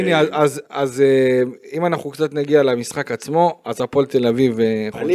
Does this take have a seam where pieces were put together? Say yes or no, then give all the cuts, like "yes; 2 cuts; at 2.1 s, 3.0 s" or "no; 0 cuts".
no; 0 cuts